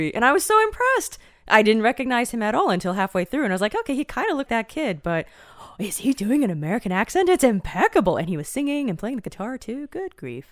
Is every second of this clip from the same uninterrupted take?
no; 1 cut; at 4.5 s

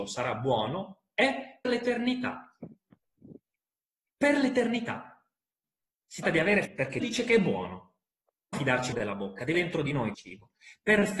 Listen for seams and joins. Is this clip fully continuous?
no; 8 cuts; at 1.6 s, 6.2 s, 6.6 s, 7.0 s, 8.5 s, 8.9 s, 9.5 s, 10.1 s

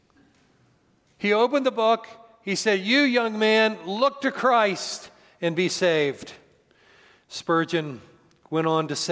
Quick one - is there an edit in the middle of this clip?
no; 0 cuts

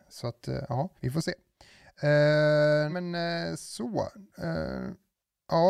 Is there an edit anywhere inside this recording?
yes; 2 cuts; at 1.0 s, 2.9 s

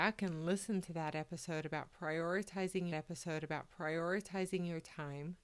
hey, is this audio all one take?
no; 1 cut; at 2.9 s

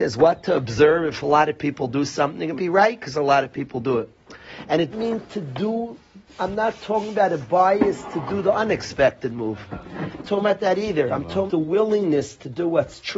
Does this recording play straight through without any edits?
no; 4 cuts; at 2.6 s, 4.9 s, 10.2 s, 11.5 s

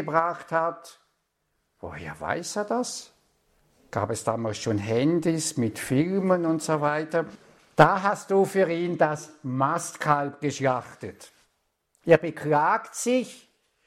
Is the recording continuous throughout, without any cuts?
yes; 0 cuts

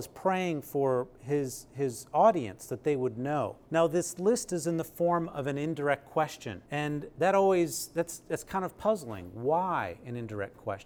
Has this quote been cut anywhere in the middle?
yes; 2 cuts; at 3.6 s, 6.7 s

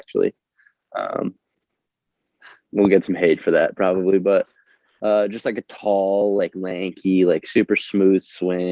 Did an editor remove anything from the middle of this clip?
no; 0 cuts

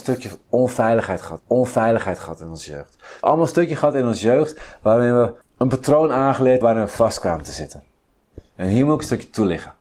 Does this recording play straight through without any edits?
no; 4 cuts; at 1.4 s, 3.2 s, 5.4 s, 6.6 s

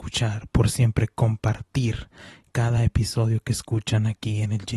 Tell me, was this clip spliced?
no; 0 cuts

